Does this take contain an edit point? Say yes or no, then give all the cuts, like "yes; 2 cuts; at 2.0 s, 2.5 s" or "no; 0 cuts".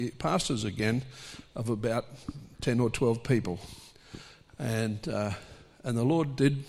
no; 0 cuts